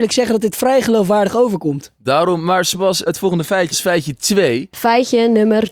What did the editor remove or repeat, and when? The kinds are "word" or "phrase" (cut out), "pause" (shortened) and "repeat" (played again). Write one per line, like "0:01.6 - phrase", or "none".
0:03.1 - word
0:03.7 - word